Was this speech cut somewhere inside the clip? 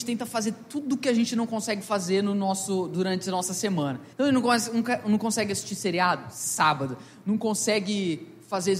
yes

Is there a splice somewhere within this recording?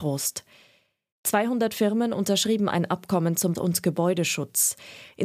yes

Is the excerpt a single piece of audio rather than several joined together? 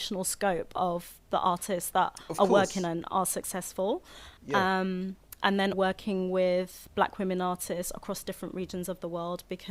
no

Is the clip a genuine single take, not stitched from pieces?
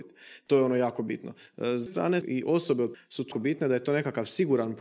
no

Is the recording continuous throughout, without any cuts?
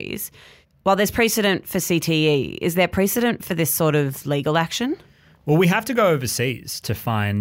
yes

